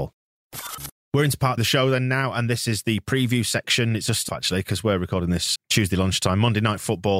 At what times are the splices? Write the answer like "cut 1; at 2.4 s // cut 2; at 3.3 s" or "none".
cut 1; at 1.0 s // cut 2; at 1.6 s // cut 3; at 4.3 s // cut 4; at 5.6 s